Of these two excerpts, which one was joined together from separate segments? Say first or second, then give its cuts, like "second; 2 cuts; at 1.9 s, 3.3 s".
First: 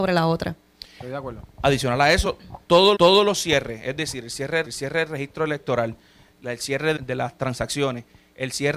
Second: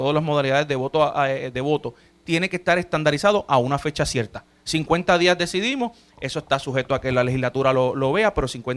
first; 3 cuts; at 2.9 s, 4.7 s, 7.0 s